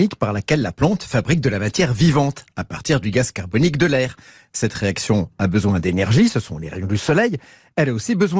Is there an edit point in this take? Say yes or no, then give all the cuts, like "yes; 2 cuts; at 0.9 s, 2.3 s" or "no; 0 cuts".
no; 0 cuts